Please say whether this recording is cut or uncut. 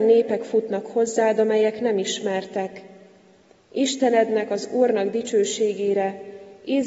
uncut